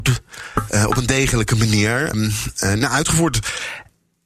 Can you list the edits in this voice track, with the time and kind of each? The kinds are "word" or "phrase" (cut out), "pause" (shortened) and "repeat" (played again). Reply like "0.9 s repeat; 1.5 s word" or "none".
2.1 s word